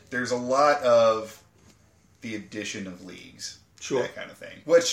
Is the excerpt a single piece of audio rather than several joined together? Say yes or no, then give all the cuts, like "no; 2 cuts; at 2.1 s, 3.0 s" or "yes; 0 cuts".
yes; 0 cuts